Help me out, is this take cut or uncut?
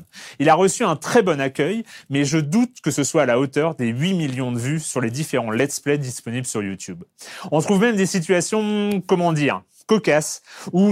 uncut